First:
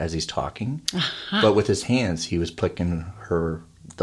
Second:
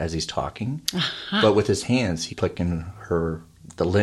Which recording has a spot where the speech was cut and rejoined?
second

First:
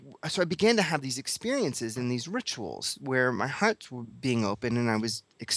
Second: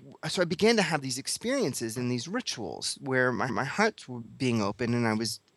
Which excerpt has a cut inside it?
second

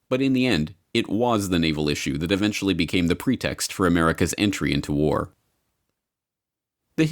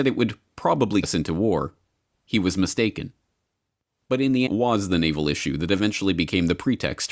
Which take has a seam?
second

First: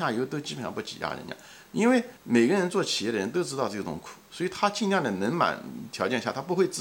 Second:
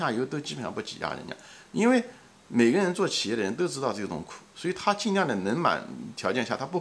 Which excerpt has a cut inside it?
first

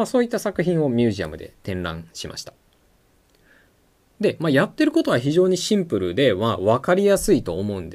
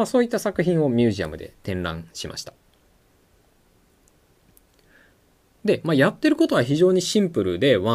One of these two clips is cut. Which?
first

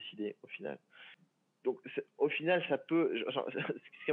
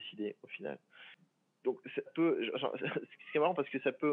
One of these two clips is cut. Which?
second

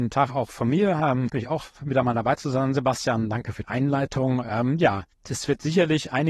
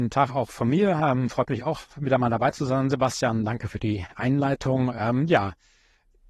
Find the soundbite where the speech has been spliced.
first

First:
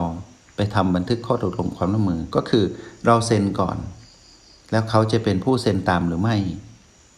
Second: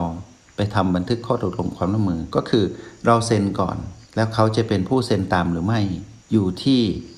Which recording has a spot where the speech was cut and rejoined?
second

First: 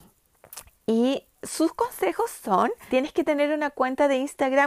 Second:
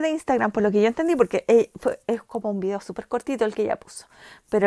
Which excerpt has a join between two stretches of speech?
first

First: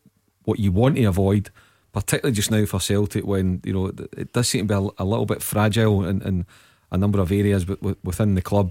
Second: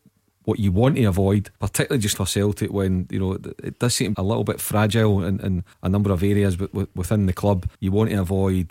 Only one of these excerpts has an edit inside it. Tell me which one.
second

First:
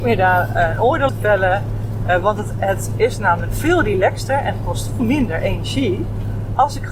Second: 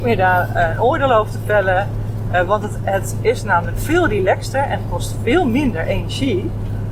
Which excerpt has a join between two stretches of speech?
first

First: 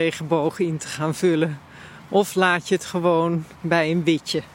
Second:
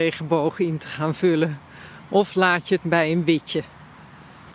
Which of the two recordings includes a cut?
second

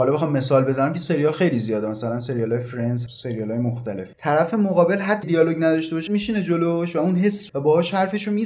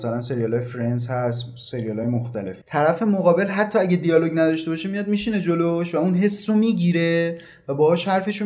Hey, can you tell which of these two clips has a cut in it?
first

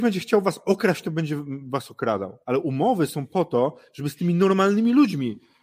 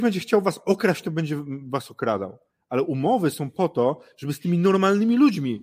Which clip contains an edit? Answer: first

